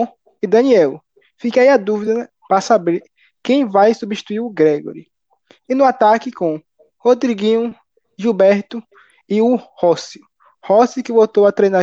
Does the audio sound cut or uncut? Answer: uncut